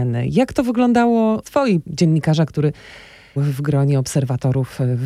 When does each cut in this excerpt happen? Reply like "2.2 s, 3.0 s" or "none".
1.4 s, 1.8 s, 3.4 s